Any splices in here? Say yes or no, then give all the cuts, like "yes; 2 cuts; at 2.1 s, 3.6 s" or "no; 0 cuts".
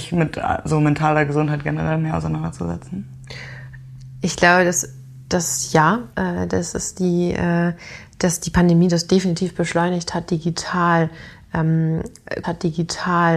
yes; 2 cuts; at 6.1 s, 12.4 s